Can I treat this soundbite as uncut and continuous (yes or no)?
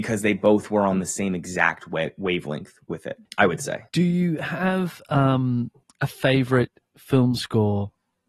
no